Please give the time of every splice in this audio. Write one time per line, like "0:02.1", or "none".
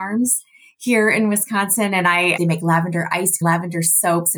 0:02.4
0:03.4